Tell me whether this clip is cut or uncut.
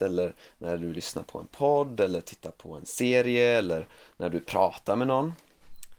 uncut